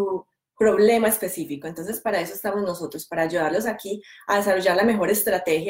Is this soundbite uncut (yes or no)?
yes